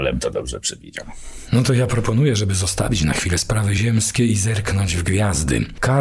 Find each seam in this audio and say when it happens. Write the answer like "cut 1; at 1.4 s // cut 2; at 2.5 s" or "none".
none